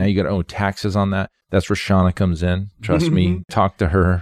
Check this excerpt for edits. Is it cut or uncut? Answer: cut